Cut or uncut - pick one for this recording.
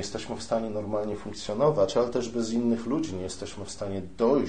uncut